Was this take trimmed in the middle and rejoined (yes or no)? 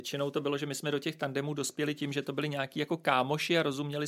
no